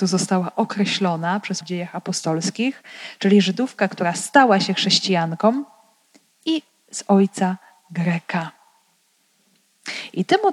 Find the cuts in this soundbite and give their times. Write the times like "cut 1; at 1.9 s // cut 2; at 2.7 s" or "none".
cut 1; at 1.6 s